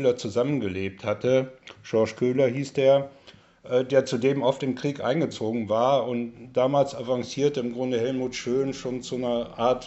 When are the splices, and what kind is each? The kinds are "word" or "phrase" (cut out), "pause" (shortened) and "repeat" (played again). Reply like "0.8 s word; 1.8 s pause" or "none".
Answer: none